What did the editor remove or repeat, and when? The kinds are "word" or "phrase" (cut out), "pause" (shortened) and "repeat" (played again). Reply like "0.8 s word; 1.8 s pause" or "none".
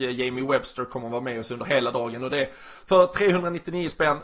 none